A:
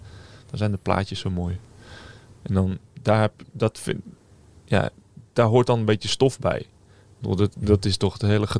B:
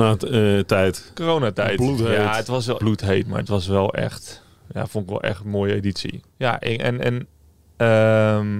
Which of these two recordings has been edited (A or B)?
B